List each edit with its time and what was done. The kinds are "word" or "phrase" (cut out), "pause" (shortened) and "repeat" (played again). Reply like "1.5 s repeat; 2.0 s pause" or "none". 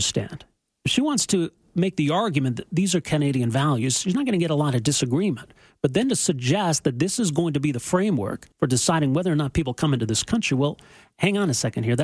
8.5 s pause

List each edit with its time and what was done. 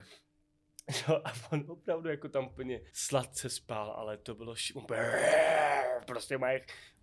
2.9 s pause

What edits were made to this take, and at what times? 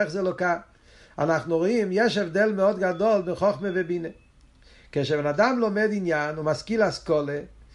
none

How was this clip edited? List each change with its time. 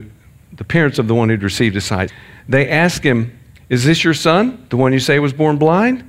none

